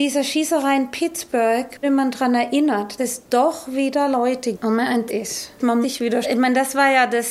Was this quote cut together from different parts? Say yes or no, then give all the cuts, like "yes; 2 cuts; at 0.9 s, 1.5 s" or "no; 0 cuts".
yes; 6 cuts; at 1.8 s, 3.0 s, 4.5 s, 5.1 s, 5.8 s, 6.2 s